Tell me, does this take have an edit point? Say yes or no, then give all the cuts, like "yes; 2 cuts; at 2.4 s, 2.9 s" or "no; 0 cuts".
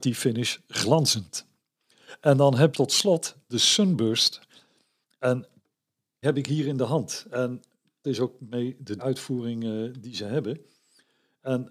yes; 4 cuts; at 2.7 s, 6.2 s, 8.0 s, 9.0 s